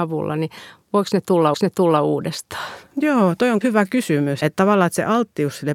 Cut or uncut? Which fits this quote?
cut